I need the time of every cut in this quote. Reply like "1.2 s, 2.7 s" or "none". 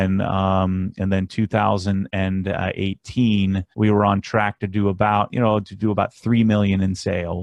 3.7 s